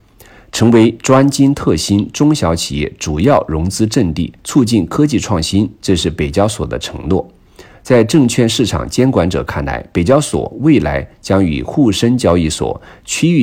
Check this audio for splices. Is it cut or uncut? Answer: cut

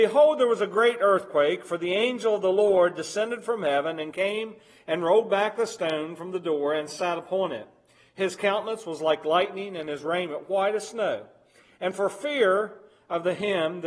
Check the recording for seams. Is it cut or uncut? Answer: uncut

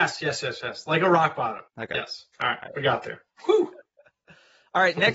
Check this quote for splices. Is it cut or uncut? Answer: cut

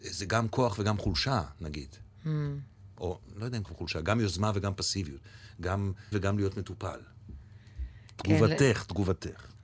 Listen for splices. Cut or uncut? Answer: cut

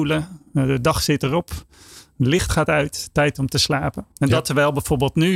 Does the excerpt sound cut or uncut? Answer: cut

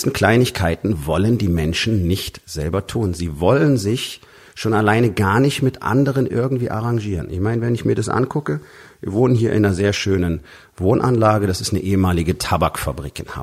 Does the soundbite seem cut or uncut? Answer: uncut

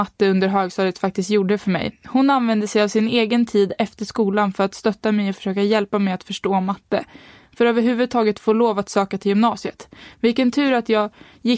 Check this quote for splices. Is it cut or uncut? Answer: uncut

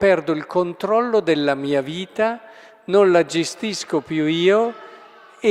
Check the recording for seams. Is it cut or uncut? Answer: uncut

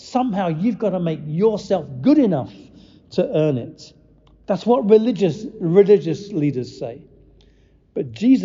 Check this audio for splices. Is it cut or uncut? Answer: uncut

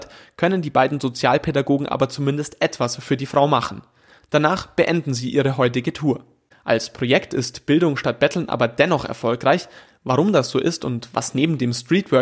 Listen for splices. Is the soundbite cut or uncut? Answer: uncut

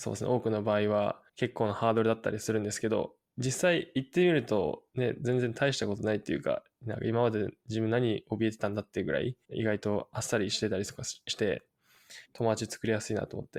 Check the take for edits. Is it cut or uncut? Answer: cut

